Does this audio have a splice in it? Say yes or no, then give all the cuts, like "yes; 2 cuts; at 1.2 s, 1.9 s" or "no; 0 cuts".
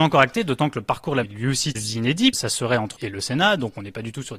yes; 4 cuts; at 1.2 s, 1.7 s, 2.3 s, 3.0 s